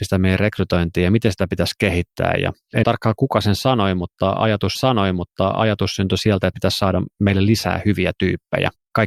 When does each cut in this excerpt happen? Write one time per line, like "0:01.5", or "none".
0:02.8
0:04.7
0:06.5

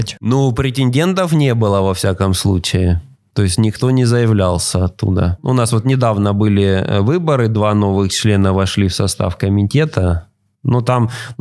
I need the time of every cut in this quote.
none

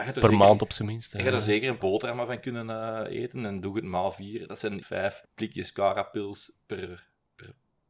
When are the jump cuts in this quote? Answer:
0:01.8
0:04.8
0:05.2

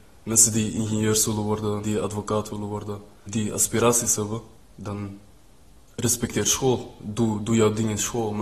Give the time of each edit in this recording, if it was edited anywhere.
0:01.8
0:03.3
0:04.6

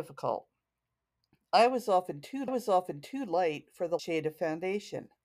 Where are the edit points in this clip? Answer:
0:02.5
0:04.0

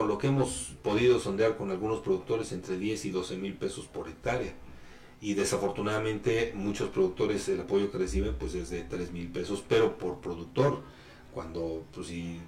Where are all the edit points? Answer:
none

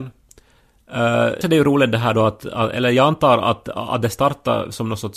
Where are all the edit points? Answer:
0:01.4

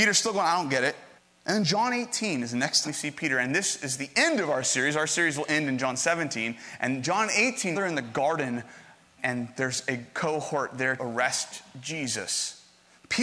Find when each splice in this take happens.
0:01.2
0:02.8
0:07.7
0:09.2
0:11.0

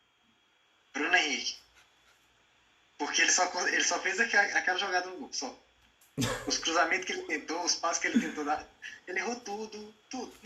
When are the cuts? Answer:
none

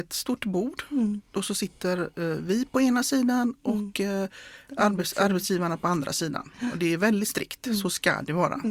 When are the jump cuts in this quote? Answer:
none

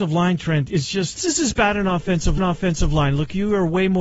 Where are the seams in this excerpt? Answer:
0:01.2
0:02.4

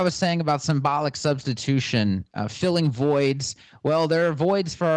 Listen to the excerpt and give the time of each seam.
none

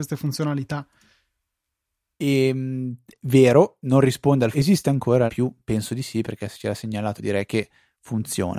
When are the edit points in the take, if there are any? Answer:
0:03.8
0:04.5
0:05.3
0:07.2

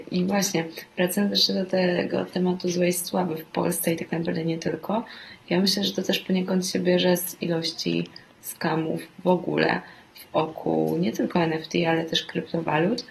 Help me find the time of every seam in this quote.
none

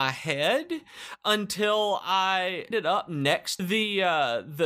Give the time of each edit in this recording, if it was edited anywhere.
0:02.7
0:03.6

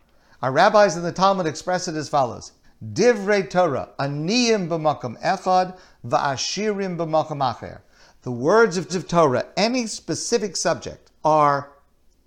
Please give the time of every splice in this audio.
0:02.6
0:08.9
0:11.2

